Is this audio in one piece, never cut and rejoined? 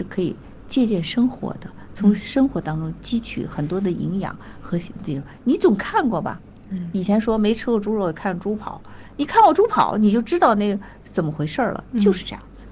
yes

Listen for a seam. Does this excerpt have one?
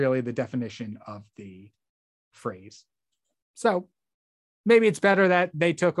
no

